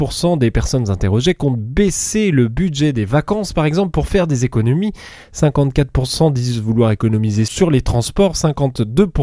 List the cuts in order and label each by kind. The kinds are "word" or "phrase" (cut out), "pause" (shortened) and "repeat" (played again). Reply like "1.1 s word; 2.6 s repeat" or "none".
none